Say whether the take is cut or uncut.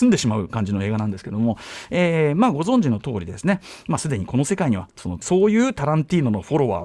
cut